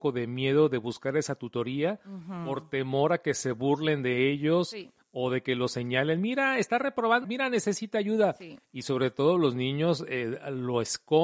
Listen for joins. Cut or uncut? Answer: cut